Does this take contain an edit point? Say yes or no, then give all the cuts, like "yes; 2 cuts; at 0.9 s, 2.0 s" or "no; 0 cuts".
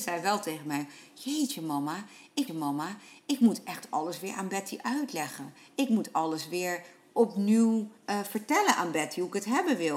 yes; 2 cuts; at 2.5 s, 8.0 s